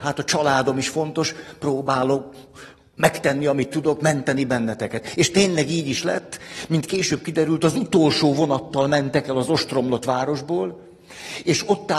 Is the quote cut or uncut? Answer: uncut